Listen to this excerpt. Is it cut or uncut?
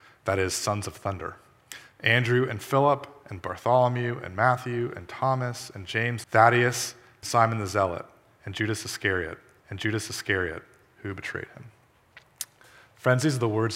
cut